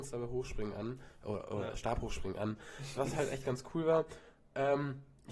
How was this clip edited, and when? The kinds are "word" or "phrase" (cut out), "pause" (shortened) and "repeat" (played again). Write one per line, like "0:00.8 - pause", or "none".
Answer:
0:03.0 - word